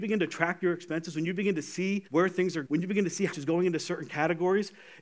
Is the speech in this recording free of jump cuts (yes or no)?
no